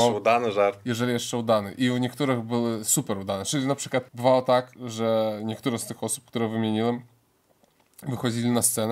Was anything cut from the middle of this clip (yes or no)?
yes